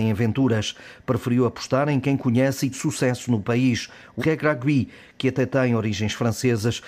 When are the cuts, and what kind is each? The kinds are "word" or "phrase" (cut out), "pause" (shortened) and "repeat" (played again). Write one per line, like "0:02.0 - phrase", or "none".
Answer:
0:02.7 - word
0:04.2 - word